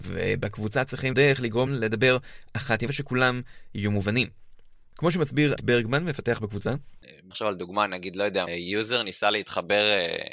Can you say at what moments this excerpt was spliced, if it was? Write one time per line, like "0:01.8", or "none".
0:01.1
0:01.7
0:02.9
0:05.6
0:07.3
0:08.5